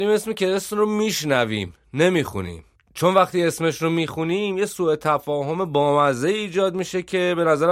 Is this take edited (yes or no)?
no